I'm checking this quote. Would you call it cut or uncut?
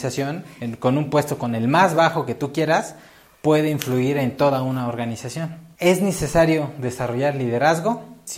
uncut